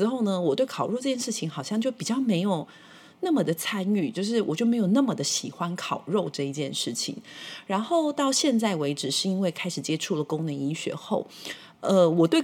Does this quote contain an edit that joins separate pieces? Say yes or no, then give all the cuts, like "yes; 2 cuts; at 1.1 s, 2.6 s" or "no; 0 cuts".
no; 0 cuts